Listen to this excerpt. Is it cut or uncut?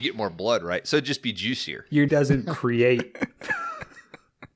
cut